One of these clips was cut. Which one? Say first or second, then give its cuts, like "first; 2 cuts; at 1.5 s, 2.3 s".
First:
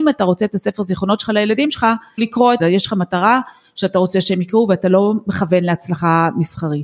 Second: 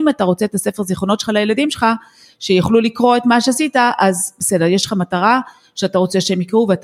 first; 2 cuts; at 2.2 s, 2.6 s